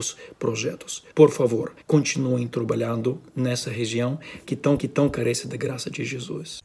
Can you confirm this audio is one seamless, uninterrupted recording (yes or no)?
no